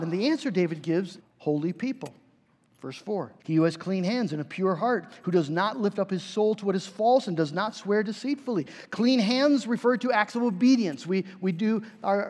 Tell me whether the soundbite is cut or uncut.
cut